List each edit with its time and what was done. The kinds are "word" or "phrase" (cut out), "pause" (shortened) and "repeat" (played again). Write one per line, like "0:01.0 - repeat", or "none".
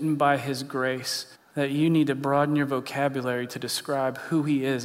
0:01.3 - pause